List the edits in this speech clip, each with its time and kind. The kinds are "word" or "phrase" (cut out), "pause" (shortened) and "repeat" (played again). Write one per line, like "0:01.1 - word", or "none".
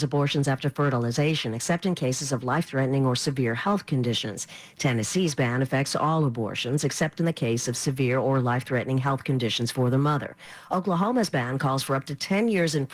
none